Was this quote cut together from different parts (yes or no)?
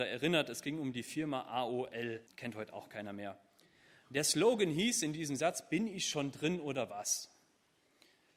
yes